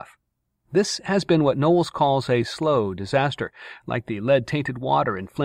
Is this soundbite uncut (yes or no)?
yes